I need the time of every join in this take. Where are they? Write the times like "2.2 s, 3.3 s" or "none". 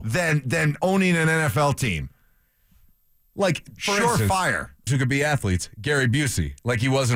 4.9 s